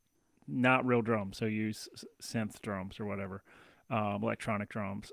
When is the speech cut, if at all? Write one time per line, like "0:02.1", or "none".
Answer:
none